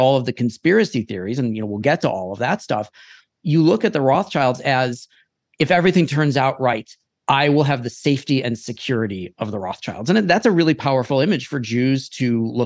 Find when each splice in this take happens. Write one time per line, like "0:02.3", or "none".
none